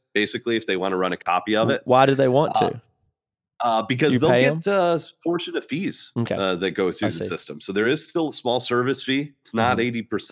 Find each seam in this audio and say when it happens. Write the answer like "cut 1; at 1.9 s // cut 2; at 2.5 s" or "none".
none